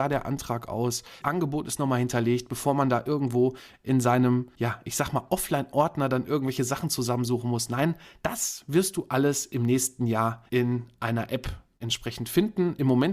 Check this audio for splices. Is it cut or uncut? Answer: cut